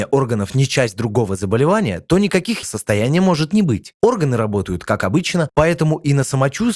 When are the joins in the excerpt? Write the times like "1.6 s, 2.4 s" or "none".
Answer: 2.6 s